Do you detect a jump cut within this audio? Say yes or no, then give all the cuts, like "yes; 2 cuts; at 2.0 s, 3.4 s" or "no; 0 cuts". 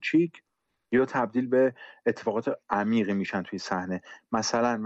no; 0 cuts